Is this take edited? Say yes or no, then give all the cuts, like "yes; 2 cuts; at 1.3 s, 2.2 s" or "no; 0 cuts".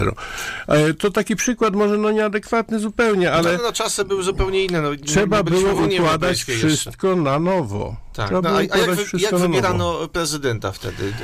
no; 0 cuts